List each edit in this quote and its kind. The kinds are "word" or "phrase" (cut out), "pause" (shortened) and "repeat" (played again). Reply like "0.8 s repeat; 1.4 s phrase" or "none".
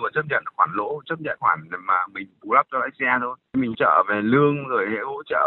1.4 s word; 3.7 s word